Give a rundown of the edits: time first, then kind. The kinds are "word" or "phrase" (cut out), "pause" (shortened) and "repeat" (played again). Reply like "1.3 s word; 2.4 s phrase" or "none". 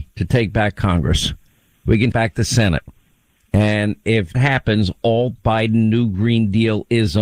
2.1 s word; 4.3 s word; 5.4 s word